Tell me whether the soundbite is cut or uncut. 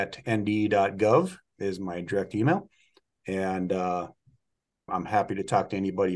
cut